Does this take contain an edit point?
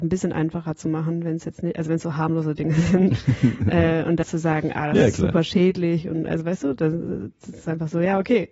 yes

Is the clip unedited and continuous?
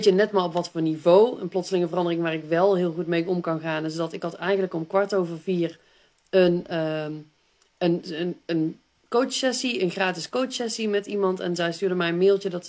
yes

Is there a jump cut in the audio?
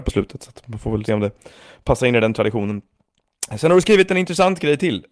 yes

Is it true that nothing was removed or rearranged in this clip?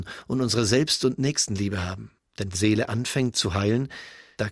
no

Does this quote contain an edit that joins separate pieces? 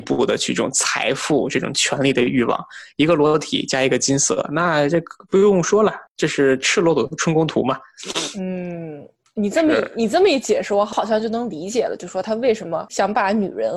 no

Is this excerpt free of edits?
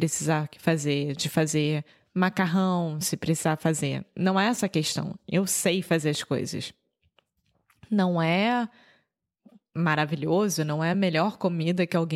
yes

